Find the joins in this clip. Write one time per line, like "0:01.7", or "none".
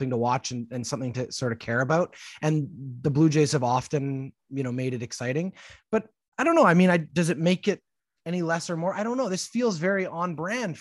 none